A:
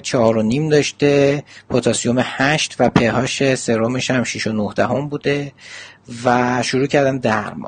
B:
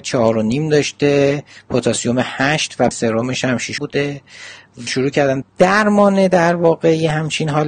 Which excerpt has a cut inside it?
B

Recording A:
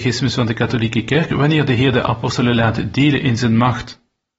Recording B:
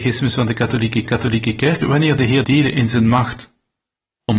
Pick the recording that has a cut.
B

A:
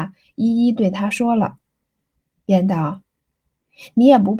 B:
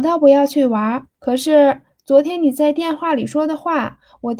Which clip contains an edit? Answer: B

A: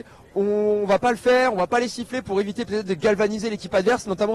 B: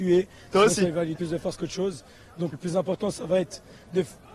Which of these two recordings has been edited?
B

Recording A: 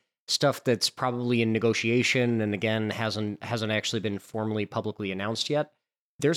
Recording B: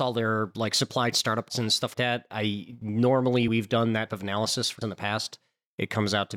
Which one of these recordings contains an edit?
B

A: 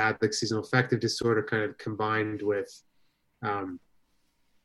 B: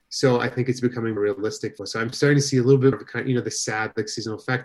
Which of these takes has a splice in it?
B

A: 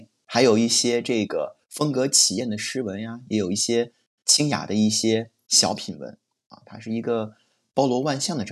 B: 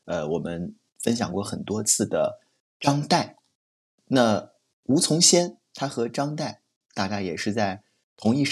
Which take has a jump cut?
A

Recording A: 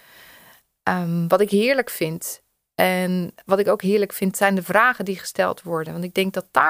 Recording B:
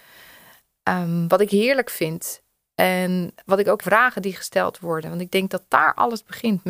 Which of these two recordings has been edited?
B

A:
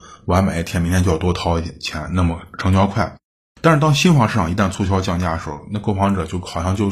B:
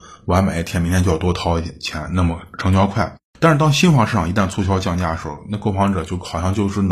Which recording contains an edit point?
B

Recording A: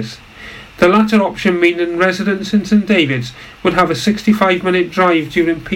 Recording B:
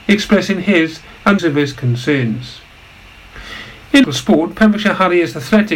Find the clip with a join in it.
B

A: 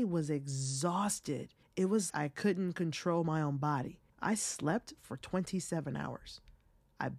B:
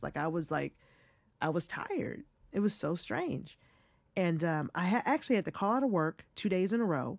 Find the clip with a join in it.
A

